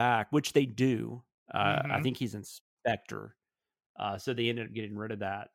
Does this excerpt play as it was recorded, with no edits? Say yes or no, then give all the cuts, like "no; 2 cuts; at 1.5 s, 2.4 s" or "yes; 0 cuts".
yes; 0 cuts